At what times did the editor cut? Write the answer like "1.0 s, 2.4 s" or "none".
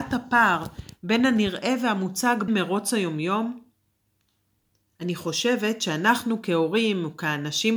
2.5 s

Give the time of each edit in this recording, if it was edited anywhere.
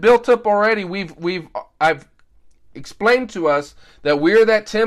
none

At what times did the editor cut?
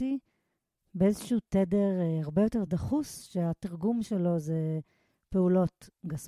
none

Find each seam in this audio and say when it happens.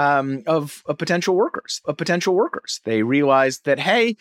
1.8 s

